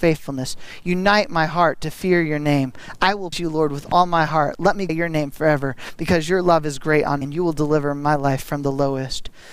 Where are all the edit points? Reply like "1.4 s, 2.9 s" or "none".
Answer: 3.3 s, 4.9 s, 7.2 s